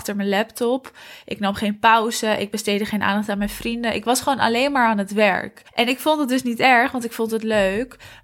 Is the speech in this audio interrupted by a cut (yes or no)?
yes